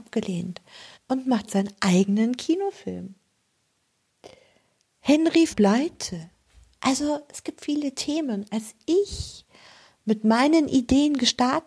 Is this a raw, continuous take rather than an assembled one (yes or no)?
no